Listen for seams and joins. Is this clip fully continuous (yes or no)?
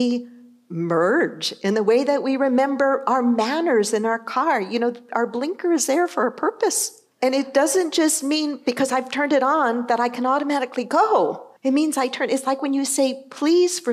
no